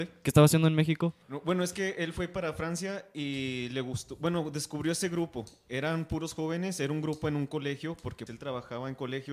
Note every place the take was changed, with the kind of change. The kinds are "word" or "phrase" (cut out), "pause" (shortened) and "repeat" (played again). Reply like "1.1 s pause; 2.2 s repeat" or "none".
1.2 s pause; 8.3 s word